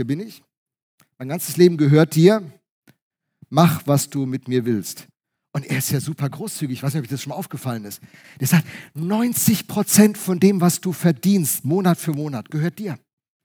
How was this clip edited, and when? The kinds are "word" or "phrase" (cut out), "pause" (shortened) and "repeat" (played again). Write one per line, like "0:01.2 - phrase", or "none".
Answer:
none